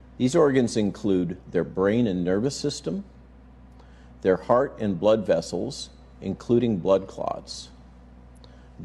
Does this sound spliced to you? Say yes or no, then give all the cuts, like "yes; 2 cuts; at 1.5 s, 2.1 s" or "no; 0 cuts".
no; 0 cuts